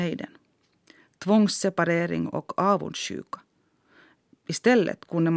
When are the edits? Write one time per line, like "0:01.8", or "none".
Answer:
none